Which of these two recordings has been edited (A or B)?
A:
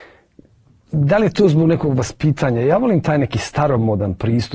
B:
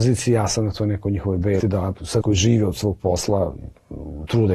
B